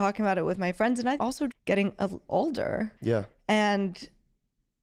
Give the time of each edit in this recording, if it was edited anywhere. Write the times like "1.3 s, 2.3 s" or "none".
1.2 s, 1.5 s, 2.3 s, 3.0 s